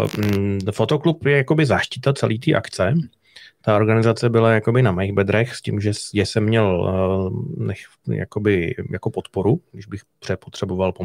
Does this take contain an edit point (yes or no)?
no